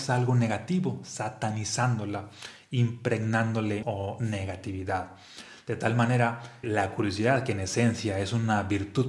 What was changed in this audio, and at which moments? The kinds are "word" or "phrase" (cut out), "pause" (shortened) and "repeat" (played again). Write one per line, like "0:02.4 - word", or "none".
0:03.8 - word
0:06.6 - word

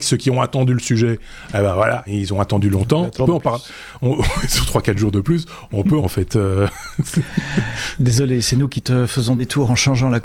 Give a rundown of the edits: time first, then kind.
0:02.1 - word
0:03.2 - phrase
0:06.0 - phrase

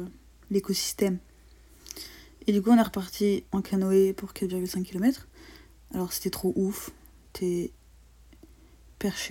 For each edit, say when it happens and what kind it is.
none

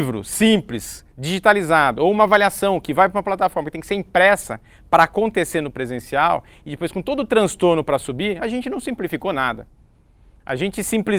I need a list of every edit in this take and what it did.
none

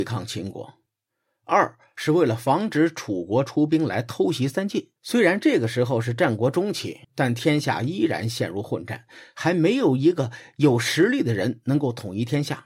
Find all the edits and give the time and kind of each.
0:05.0 - pause
0:07.0 - pause

